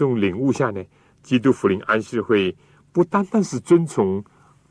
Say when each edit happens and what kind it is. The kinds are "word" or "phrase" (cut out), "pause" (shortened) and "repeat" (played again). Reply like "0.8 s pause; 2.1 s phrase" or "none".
none